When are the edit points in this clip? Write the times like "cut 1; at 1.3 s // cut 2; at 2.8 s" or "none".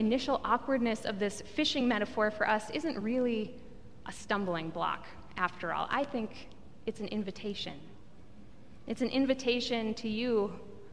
none